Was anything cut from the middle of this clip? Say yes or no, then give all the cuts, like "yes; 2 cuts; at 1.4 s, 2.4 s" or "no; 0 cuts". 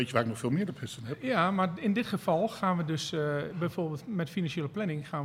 no; 0 cuts